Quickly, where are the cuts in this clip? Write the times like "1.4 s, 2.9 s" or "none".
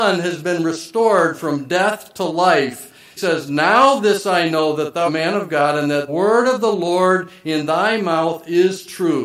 3.2 s, 5.1 s, 6.1 s